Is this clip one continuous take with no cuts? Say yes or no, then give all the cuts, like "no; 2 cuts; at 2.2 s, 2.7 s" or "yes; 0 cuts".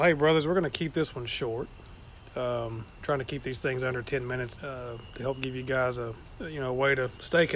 no; 1 cut; at 4.6 s